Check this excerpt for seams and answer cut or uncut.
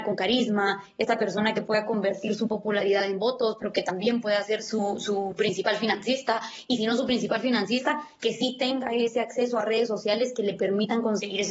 uncut